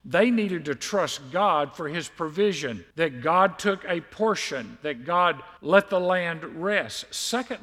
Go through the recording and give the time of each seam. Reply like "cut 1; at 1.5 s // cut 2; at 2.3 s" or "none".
cut 1; at 2.9 s // cut 2; at 5.6 s